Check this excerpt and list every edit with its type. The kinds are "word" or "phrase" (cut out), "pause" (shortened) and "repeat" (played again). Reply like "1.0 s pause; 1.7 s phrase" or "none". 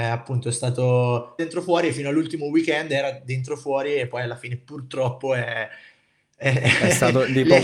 1.4 s phrase